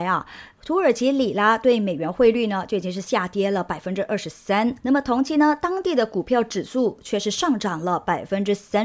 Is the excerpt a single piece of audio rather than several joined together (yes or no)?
no